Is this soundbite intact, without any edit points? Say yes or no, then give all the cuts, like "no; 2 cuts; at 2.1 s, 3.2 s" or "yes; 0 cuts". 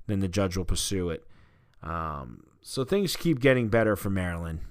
yes; 0 cuts